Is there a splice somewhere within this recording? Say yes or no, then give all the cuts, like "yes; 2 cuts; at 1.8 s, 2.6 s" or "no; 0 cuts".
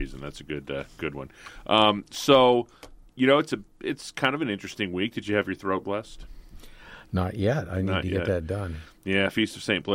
yes; 1 cut; at 3.0 s